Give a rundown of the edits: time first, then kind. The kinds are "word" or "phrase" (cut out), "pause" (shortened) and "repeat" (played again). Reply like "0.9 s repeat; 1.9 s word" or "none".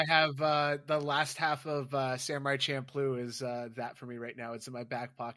none